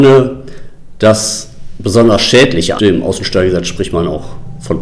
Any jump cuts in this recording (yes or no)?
yes